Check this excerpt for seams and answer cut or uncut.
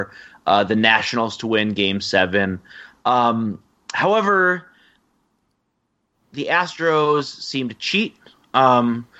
uncut